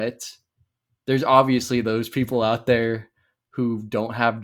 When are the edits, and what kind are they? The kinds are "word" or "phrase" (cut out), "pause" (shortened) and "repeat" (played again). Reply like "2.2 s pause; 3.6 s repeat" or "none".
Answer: none